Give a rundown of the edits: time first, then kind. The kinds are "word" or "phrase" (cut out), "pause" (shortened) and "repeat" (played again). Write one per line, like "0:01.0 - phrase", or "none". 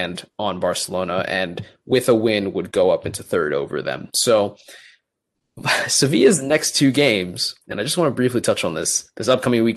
0:07.6 - pause